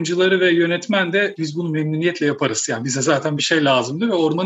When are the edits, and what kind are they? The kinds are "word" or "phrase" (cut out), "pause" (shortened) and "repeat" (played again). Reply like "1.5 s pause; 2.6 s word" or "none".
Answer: 1.4 s word; 3.4 s word